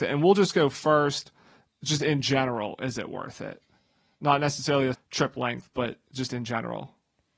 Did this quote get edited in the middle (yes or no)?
yes